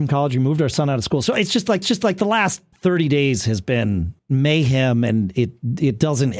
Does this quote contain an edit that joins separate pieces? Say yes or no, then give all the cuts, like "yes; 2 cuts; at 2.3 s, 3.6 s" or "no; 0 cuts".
yes; 3 cuts; at 1.8 s, 2.7 s, 4.2 s